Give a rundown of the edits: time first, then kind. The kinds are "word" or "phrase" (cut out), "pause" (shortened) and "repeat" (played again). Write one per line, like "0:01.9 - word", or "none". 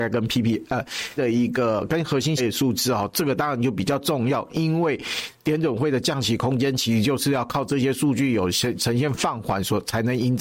0:01.2 - word
0:02.4 - word